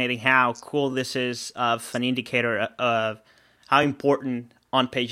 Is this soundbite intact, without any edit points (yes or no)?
yes